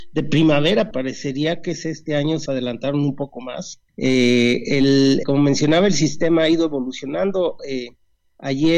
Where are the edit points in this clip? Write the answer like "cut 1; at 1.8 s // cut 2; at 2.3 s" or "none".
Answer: cut 1; at 0.9 s // cut 2; at 2.5 s // cut 3; at 3.9 s // cut 4; at 5.2 s